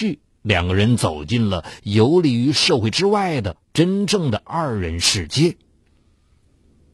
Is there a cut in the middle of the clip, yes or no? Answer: yes